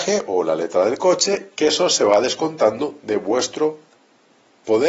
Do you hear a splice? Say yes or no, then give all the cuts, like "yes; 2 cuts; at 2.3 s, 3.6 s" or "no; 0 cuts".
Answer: no; 0 cuts